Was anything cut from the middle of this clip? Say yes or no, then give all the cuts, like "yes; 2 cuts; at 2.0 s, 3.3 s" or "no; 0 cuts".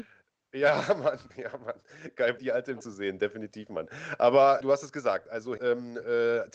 yes; 5 cuts; at 1.3 s, 2.4 s, 2.8 s, 4.6 s, 5.6 s